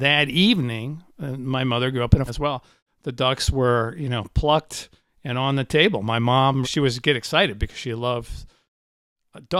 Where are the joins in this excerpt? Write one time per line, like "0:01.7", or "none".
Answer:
0:02.3
0:06.6